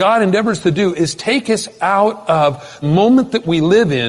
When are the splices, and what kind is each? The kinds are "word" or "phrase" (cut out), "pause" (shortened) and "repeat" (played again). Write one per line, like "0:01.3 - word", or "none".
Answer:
0:02.8 - word